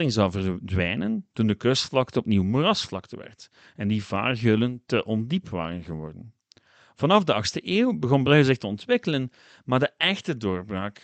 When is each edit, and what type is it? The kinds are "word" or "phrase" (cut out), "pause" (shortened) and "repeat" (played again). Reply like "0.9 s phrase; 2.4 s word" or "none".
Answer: none